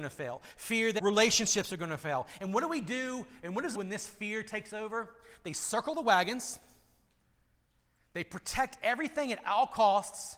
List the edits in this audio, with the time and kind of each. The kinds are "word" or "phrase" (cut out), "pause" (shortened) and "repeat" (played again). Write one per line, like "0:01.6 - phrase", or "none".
0:01.0 - word
0:03.7 - phrase

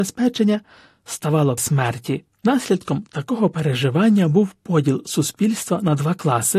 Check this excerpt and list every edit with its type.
0:01.6 - phrase
0:02.3 - pause

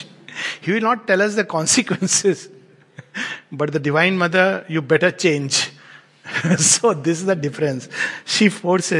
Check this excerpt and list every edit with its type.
none

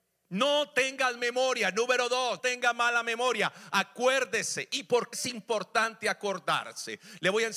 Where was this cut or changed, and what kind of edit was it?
0:01.2 - word
0:02.4 - word
0:05.1 - word

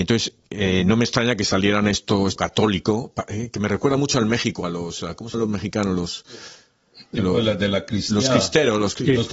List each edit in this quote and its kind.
0:02.4 - word
0:05.3 - word

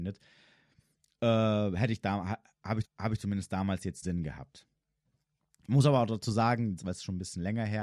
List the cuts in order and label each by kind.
0:02.8 - repeat
0:04.0 - phrase
0:06.8 - word

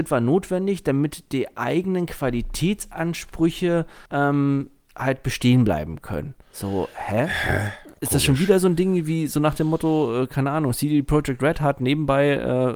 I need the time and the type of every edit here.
0:04.1 - pause
0:06.4 - pause
0:08.0 - pause

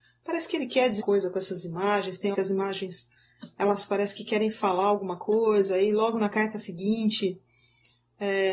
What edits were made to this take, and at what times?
0:01.0 - word
0:02.3 - word

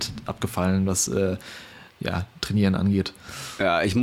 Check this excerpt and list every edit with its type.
none

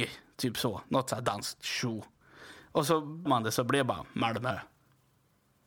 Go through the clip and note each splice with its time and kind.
0:03.3 - word

